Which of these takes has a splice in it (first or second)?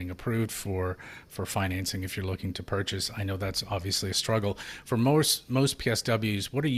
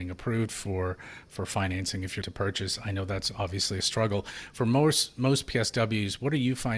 second